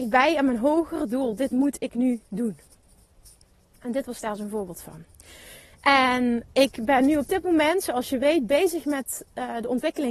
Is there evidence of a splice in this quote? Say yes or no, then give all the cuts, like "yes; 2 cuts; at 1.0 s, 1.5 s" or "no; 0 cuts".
no; 0 cuts